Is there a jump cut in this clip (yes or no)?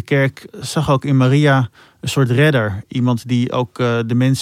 no